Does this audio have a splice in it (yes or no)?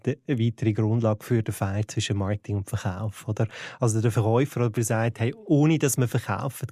yes